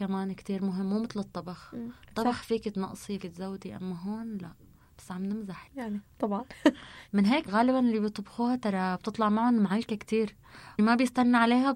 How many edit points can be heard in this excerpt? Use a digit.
4